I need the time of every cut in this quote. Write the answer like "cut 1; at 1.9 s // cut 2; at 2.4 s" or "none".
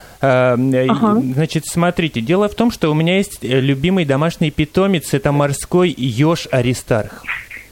none